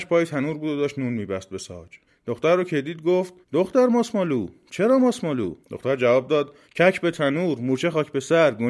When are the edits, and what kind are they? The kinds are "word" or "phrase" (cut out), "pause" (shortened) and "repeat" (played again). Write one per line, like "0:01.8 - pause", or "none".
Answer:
0:02.1 - pause
0:03.4 - pause
0:05.6 - pause
0:06.6 - pause